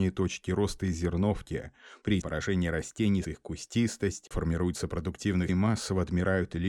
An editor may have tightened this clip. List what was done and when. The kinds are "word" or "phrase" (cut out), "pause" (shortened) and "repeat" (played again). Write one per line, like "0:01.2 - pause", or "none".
0:02.2 - word
0:03.2 - word
0:04.3 - word
0:05.5 - word